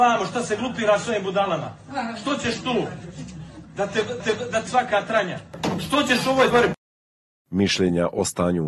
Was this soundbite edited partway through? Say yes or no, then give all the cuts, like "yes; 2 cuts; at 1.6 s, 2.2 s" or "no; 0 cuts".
yes; 3 cuts; at 4.2 s, 4.7 s, 6.5 s